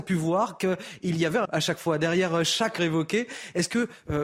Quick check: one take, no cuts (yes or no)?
no